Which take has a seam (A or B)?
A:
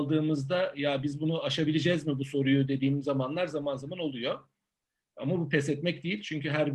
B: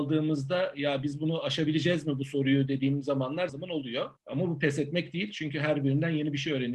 B